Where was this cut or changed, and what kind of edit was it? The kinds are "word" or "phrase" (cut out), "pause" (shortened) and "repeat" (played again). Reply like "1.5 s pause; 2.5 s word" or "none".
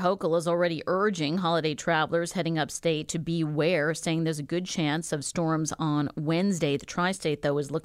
none